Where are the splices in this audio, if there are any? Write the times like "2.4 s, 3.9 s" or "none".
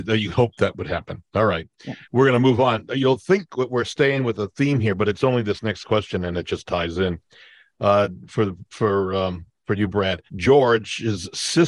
2.0 s, 10.3 s